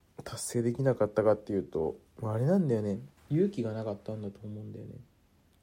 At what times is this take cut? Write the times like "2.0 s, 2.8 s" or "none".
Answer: 2.1 s, 3.2 s